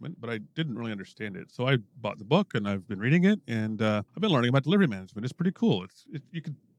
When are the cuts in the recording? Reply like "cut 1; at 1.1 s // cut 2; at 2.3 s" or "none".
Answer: cut 1; at 1.9 s // cut 2; at 4.1 s